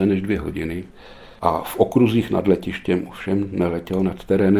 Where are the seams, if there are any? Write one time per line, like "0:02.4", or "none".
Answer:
0:01.3